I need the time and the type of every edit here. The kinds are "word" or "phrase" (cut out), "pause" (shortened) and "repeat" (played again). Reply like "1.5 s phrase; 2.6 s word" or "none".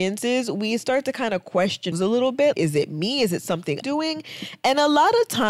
1.9 s word; 2.5 s word; 3.8 s word